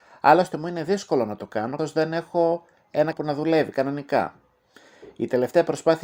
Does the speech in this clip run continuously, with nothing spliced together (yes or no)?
no